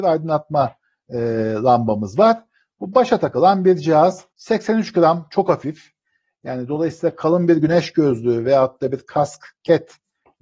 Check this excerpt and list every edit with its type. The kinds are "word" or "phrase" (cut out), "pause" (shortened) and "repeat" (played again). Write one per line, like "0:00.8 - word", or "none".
0:04.3 - pause